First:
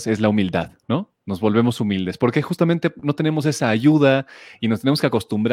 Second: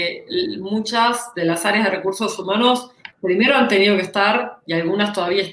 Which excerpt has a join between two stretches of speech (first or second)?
first